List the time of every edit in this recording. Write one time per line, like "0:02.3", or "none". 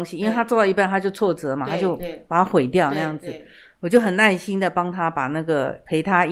none